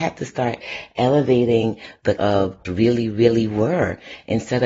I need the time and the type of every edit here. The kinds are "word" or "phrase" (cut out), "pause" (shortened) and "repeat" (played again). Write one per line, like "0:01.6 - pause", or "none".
0:02.2 - word
0:02.6 - phrase